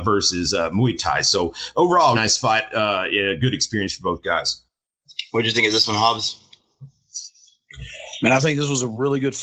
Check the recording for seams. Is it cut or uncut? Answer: cut